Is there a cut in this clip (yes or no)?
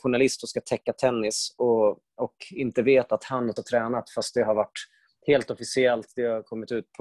yes